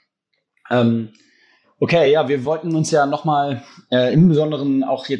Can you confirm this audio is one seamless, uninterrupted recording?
yes; 0 cuts

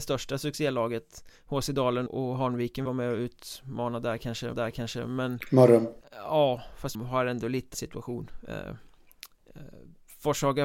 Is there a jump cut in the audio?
yes; 7 cuts; at 1.3 s, 2.1 s, 2.9 s, 4.5 s, 6.0 s, 6.9 s, 7.7 s

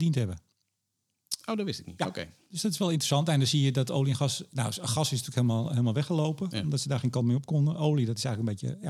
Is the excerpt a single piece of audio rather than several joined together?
yes; 0 cuts

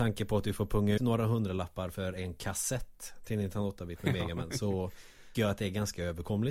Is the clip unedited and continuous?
no; 2 cuts; at 1.0 s, 5.3 s

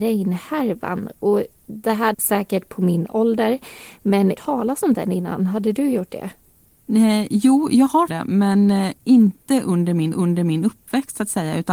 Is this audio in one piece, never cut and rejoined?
no; 4 cuts; at 2.1 s, 4.4 s, 8.1 s, 10.1 s

